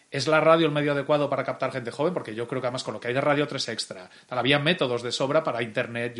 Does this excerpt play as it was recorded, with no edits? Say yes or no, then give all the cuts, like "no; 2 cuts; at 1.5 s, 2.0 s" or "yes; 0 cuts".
yes; 0 cuts